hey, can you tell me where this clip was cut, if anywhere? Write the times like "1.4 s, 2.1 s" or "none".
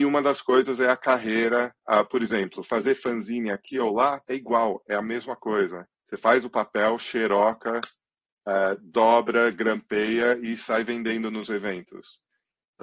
1.8 s, 4.2 s, 5.9 s